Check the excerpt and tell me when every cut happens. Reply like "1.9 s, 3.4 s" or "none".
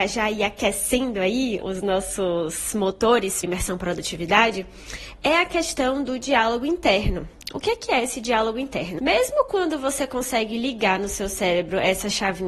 1.6 s, 3.4 s, 9.0 s